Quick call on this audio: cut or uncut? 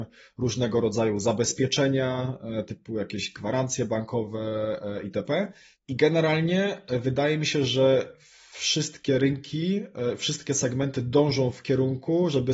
uncut